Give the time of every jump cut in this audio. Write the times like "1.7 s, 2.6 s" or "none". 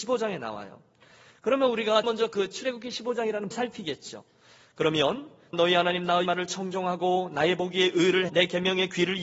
2.0 s, 3.5 s, 5.5 s, 6.2 s, 8.3 s